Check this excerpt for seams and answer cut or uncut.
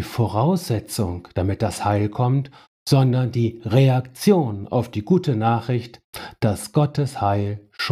uncut